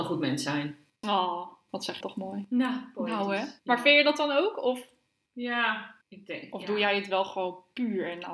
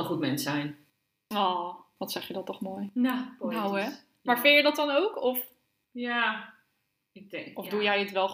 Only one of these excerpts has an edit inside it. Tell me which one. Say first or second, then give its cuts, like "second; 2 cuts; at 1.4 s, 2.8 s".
first; 4 cuts; at 1.0 s, 2.0 s, 3.6 s, 6.0 s